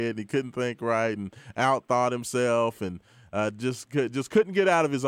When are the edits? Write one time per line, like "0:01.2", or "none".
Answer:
none